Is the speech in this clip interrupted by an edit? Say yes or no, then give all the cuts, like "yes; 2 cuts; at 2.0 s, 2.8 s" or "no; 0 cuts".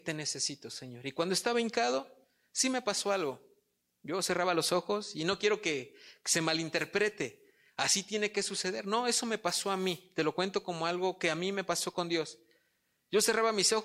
no; 0 cuts